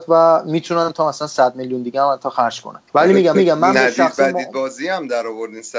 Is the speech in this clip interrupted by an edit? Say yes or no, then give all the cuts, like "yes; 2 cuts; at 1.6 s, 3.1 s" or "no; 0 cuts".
yes; 2 cuts; at 2.9 s, 3.3 s